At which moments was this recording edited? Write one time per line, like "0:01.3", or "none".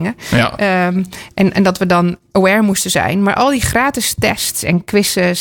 none